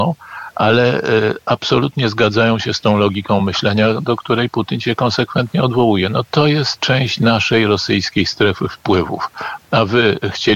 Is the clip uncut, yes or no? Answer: yes